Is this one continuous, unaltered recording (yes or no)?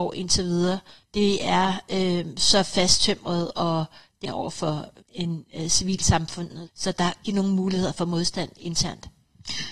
no